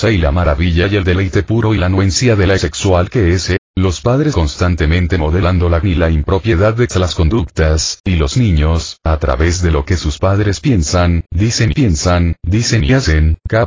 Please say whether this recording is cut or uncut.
cut